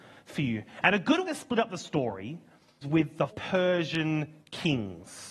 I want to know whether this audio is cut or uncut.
cut